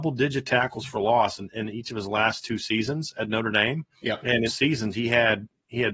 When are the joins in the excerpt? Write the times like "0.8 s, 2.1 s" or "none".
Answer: 3.9 s, 4.5 s